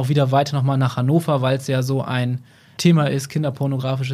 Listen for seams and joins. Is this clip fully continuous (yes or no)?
yes